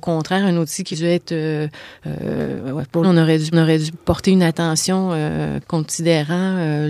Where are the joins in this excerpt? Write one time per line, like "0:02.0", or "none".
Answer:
0:00.9
0:03.0
0:03.5
0:05.6